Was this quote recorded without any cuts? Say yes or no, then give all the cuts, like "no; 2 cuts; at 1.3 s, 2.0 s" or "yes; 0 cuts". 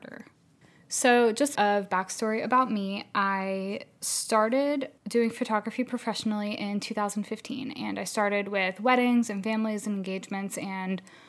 no; 2 cuts; at 1.6 s, 5.0 s